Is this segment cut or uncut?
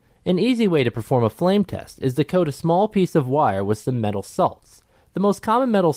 uncut